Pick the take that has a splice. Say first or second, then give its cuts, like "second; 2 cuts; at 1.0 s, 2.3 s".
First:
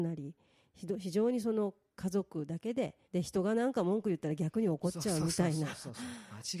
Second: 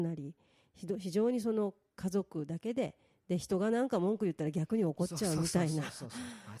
first; 1 cut; at 3.0 s